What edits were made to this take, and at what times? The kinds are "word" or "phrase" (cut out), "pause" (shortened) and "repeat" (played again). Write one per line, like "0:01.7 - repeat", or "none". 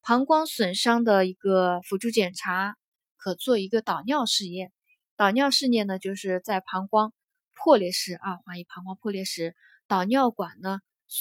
none